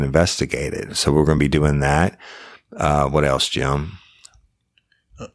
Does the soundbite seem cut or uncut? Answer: uncut